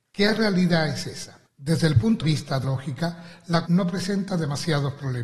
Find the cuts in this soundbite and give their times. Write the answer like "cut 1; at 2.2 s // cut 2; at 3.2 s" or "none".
cut 1; at 1.5 s // cut 2; at 2.2 s // cut 3; at 2.6 s // cut 4; at 3.7 s